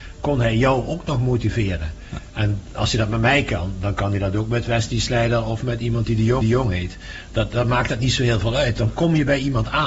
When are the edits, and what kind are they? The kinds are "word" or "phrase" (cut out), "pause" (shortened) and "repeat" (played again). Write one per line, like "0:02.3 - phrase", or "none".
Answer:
0:06.4 - repeat